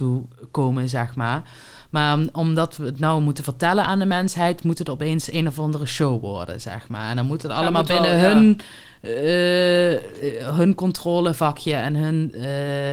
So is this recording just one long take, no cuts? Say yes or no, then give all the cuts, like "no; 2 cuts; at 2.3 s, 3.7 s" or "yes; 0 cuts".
yes; 0 cuts